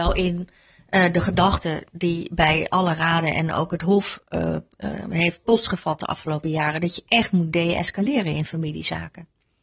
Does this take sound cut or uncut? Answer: uncut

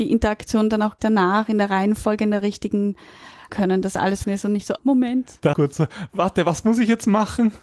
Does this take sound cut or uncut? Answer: cut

